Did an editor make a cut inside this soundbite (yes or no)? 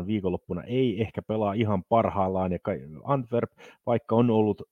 no